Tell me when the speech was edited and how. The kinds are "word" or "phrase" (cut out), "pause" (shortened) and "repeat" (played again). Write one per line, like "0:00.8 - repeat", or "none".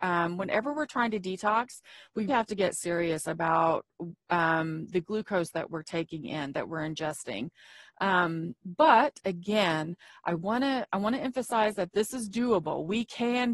0:02.3 - word